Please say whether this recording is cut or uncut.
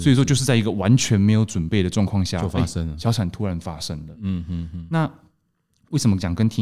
uncut